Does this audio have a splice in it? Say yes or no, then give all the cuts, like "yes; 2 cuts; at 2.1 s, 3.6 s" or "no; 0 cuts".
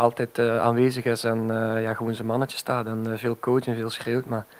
no; 0 cuts